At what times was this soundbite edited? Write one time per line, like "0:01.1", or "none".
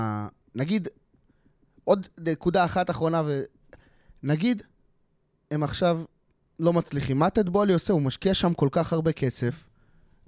none